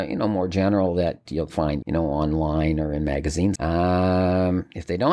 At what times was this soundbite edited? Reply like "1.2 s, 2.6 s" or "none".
1.8 s, 3.6 s